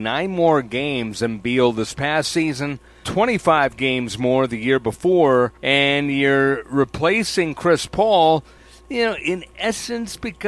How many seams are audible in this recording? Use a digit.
2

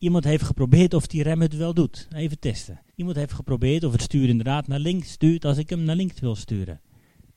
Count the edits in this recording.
1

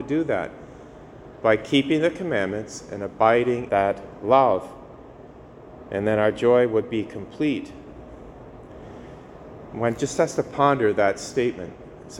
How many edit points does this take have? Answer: 1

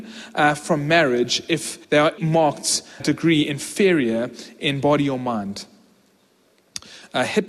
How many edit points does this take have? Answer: 3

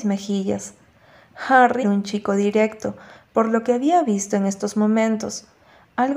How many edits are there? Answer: 1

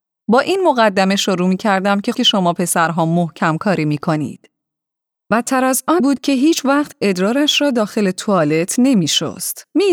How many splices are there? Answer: 2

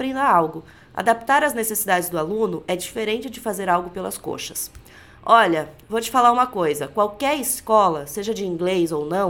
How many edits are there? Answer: 0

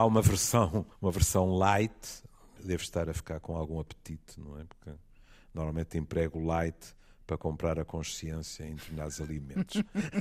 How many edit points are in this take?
2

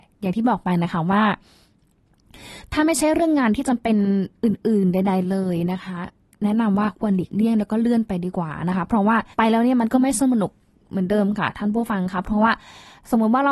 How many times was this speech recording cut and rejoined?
2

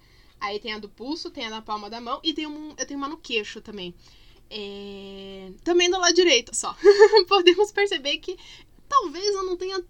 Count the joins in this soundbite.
1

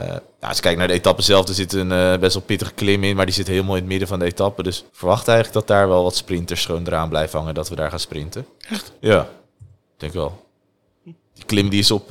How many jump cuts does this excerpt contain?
2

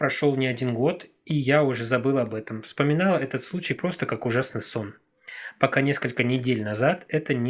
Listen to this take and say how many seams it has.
0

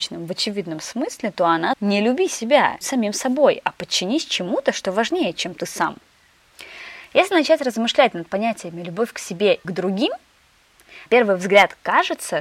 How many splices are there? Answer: 4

